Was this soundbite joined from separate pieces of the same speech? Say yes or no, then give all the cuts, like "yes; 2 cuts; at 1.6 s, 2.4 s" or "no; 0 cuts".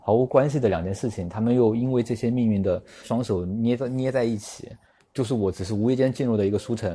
no; 0 cuts